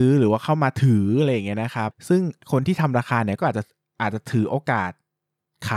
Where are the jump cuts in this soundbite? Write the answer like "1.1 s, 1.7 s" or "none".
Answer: none